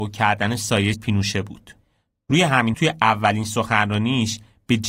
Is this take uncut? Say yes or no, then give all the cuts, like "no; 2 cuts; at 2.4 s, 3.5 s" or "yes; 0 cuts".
no; 2 cuts; at 0.9 s, 2.7 s